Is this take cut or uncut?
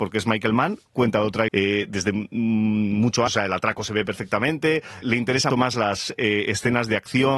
cut